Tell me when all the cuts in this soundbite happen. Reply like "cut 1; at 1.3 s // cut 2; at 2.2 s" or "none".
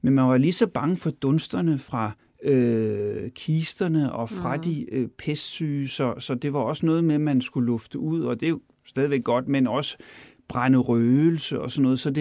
none